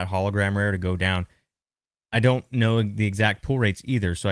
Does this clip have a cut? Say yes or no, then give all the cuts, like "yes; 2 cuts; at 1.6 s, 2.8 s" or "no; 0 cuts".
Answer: no; 0 cuts